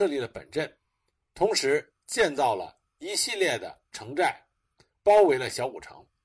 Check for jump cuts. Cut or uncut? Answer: uncut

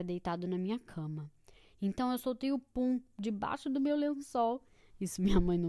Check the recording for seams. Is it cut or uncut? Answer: uncut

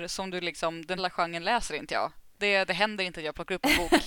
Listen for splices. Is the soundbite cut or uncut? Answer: cut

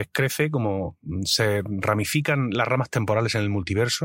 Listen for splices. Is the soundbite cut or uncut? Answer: uncut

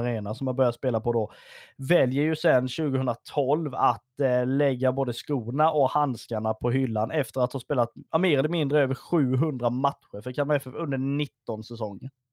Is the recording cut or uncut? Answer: cut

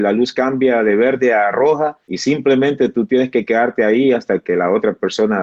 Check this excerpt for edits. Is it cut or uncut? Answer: cut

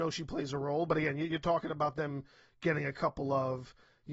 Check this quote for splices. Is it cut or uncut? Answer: uncut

